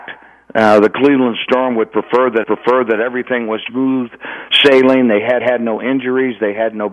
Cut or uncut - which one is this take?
cut